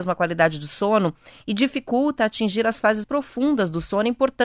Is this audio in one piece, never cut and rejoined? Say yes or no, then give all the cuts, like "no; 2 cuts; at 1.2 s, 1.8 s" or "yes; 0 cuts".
no; 1 cut; at 3.0 s